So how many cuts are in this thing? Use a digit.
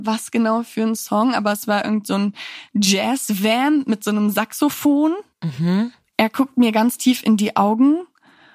0